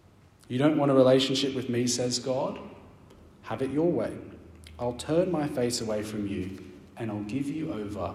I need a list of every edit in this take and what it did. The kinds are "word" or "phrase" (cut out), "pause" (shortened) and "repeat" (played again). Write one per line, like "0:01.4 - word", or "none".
none